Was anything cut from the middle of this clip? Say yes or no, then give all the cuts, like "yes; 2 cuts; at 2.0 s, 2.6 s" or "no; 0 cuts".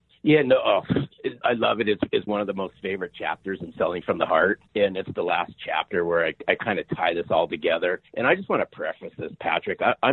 yes; 4 cuts; at 1.4 s, 2.3 s, 4.7 s, 8.1 s